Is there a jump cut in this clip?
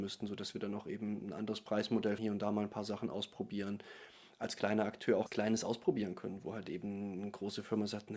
yes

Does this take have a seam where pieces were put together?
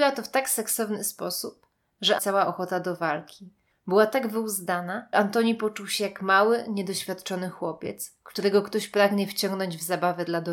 yes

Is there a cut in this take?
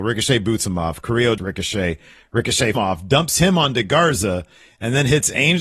yes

